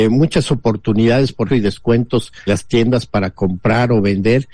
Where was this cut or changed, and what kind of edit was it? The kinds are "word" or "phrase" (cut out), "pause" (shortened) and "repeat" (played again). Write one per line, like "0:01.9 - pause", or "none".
0:01.5 - word
0:02.5 - word